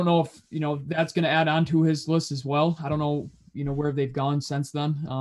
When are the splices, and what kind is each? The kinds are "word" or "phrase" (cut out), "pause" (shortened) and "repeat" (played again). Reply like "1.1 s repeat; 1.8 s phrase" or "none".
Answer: none